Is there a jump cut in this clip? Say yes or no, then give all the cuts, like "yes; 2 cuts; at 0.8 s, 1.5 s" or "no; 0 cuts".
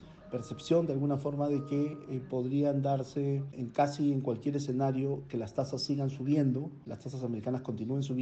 no; 0 cuts